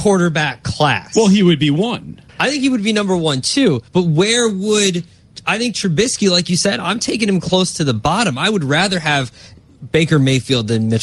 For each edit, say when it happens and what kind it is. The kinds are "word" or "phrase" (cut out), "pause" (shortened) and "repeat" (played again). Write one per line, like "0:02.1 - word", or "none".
0:02.3 - pause
0:03.9 - pause